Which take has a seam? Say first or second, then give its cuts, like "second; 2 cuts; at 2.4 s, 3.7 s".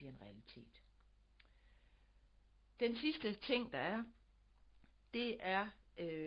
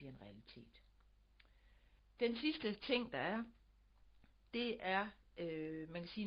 second; 1 cut; at 2.0 s